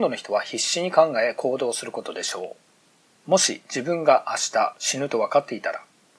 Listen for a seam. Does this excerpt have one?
no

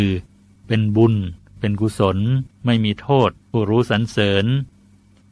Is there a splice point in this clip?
yes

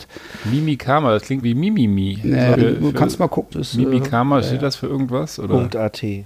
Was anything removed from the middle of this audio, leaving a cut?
yes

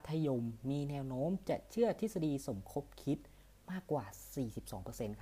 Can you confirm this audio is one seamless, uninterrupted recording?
yes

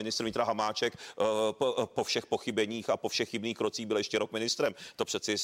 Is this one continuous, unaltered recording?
yes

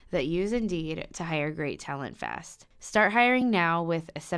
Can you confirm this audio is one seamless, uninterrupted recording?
yes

